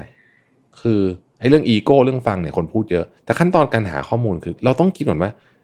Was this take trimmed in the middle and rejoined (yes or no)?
yes